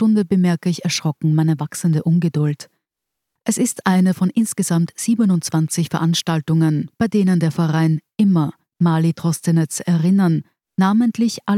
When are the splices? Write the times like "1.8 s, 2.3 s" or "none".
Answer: none